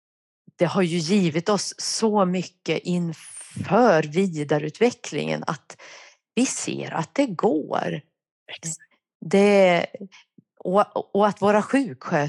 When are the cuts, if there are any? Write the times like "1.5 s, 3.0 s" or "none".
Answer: none